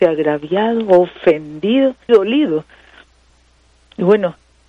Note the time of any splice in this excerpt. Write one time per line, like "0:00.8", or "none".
0:02.1